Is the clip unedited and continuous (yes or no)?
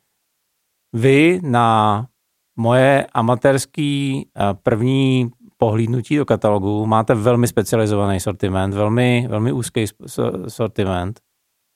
yes